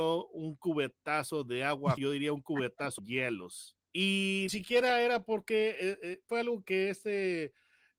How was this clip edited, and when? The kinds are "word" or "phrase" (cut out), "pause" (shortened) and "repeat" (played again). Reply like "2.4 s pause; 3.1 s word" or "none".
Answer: 2.0 s word; 3.0 s word; 4.5 s word; 6.3 s word; 6.6 s word